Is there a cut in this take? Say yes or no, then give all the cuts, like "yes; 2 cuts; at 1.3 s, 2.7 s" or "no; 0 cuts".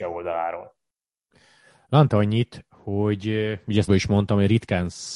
yes; 2 cuts; at 2.1 s, 3.9 s